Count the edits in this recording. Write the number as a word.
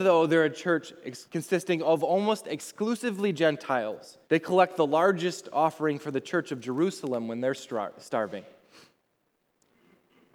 two